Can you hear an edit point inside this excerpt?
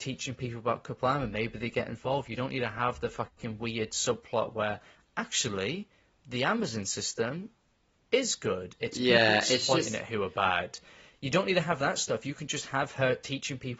no; 0 cuts

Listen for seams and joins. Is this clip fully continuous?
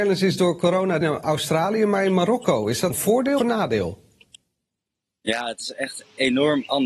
no; 3 cuts; at 1.0 s, 2.9 s, 3.4 s

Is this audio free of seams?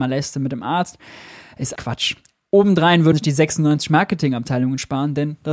no; 2 cuts; at 1.8 s, 3.1 s

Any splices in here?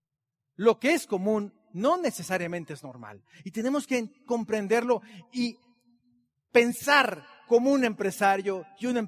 no; 0 cuts

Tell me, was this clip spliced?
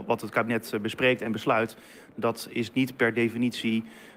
no; 0 cuts

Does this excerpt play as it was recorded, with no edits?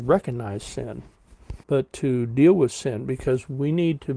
no; 1 cut; at 1.6 s

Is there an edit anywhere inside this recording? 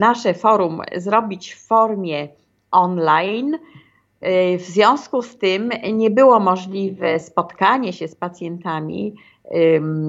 no; 0 cuts

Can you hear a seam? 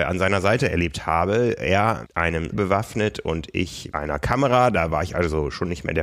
yes; 3 cuts; at 2.1 s, 2.5 s, 3.9 s

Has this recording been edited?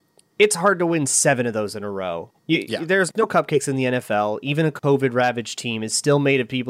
yes; 1 cut; at 2.4 s

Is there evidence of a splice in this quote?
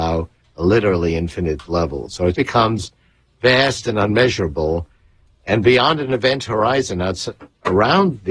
yes; 1 cut; at 2.3 s

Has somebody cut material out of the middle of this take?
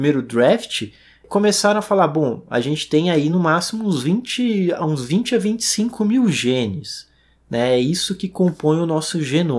no; 0 cuts

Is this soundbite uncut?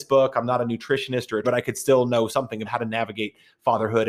no; 2 cuts; at 1.4 s, 2.6 s

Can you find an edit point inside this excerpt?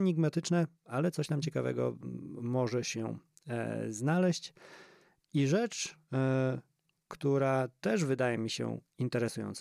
no; 0 cuts

